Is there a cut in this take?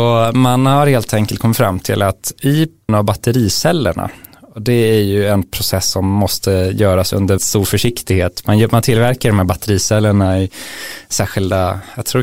yes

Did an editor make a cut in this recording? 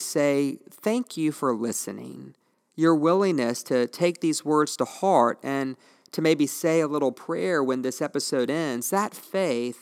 no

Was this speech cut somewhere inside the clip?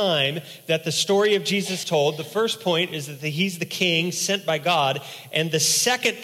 yes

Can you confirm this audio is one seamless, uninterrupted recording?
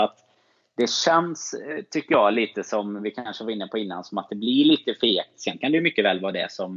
yes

